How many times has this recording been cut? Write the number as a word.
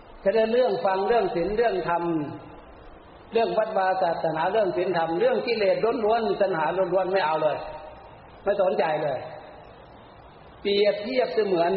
one